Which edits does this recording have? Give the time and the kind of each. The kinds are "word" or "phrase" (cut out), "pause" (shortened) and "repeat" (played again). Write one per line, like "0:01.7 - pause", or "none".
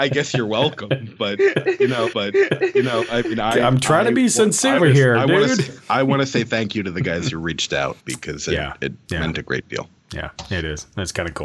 0:02.1 - repeat
0:04.8 - word
0:08.0 - pause